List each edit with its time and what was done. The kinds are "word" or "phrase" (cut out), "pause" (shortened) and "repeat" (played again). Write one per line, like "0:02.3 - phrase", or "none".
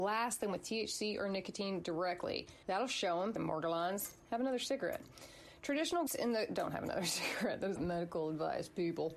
0:02.6 - pause
0:03.4 - word
0:06.1 - word
0:07.8 - word